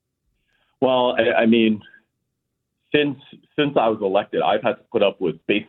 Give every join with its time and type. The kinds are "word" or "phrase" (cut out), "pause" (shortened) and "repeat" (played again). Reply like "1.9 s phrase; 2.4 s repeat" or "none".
none